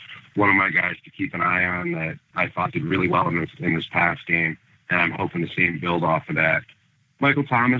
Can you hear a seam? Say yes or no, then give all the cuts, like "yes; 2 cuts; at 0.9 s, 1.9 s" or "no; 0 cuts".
no; 0 cuts